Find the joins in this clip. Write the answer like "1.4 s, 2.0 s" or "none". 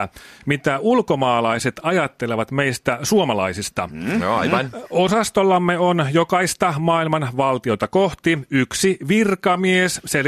none